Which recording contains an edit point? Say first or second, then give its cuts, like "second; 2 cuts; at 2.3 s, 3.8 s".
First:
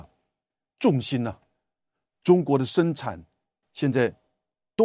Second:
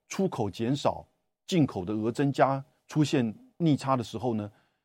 first; 1 cut; at 3.6 s